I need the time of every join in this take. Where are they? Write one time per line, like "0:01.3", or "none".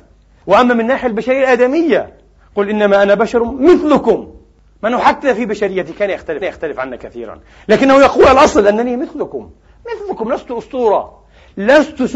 0:06.4